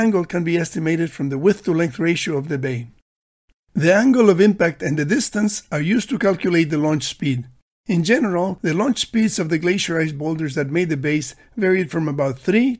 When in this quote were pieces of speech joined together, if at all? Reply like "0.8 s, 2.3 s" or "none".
none